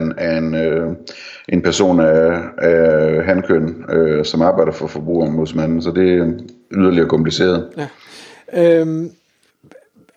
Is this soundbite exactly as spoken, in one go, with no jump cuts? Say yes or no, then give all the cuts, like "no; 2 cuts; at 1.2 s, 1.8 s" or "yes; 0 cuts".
yes; 0 cuts